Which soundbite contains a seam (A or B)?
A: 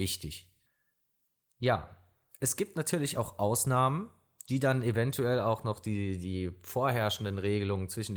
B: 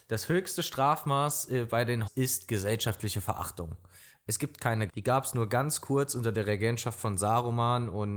B